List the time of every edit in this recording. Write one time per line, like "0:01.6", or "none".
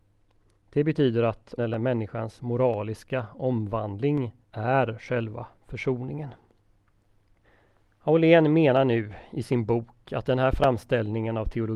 0:01.6
0:04.4
0:07.4